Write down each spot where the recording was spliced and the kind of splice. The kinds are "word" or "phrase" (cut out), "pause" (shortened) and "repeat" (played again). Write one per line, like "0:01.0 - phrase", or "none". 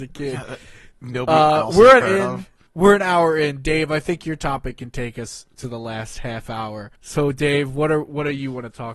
0:02.0 - word
0:02.7 - pause
0:07.0 - pause